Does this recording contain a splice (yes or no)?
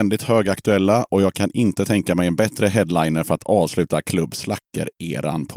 no